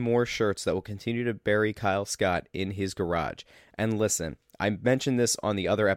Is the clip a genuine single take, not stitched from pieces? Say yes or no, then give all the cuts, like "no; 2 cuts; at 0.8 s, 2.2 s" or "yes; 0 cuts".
yes; 0 cuts